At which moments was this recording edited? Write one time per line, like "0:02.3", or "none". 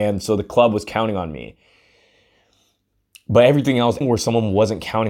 0:04.0